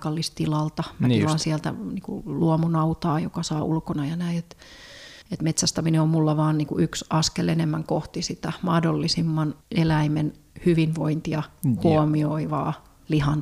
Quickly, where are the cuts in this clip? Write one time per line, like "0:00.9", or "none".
0:03.6
0:05.2
0:09.6